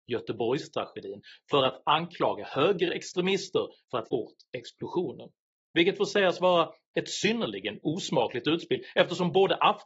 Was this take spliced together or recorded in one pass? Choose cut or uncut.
cut